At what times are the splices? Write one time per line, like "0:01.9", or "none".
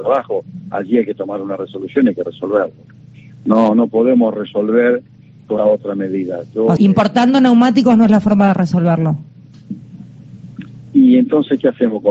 0:05.6
0:06.8